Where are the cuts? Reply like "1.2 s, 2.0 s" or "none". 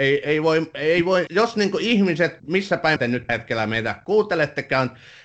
1.3 s, 2.4 s, 3.0 s, 3.3 s